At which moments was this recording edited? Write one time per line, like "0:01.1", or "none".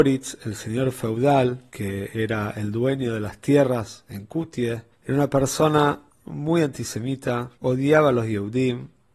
0:01.7
0:04.9
0:06.1
0:07.5